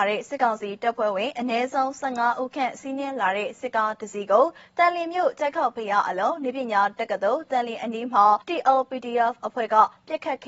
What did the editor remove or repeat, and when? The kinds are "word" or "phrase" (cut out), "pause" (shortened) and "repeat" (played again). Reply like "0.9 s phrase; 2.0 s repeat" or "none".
8.4 s pause